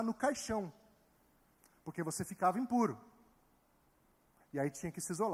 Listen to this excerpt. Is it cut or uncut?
uncut